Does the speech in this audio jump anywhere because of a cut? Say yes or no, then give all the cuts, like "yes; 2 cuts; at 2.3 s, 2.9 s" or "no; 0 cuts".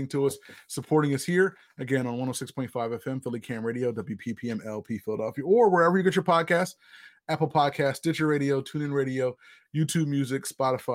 no; 0 cuts